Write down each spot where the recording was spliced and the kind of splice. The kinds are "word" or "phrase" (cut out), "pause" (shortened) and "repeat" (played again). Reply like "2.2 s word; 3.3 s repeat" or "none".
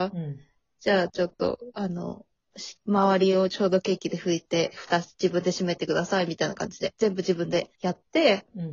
2.8 s pause; 7.8 s pause